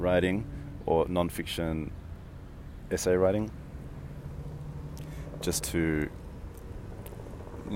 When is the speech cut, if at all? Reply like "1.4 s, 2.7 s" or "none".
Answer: none